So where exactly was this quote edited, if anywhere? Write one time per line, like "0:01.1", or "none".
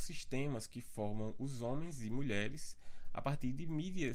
none